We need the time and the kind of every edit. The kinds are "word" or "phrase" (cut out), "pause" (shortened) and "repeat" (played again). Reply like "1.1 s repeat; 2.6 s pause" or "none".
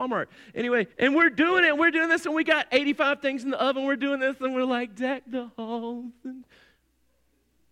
0.9 s pause